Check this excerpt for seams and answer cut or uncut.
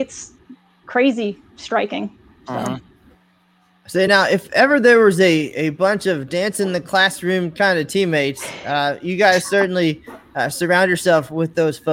uncut